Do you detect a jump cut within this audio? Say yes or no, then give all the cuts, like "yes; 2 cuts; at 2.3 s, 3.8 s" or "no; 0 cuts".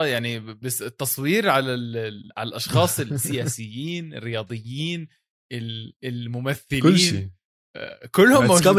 yes; 1 cut; at 2.3 s